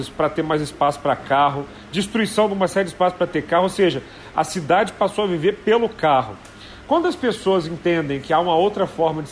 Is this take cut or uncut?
uncut